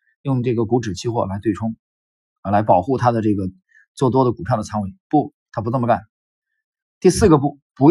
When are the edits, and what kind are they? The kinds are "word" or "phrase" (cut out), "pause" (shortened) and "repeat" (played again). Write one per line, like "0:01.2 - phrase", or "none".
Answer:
none